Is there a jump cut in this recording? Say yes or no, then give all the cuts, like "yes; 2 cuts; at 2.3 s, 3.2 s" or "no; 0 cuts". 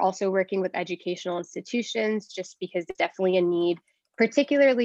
yes; 1 cut; at 2.9 s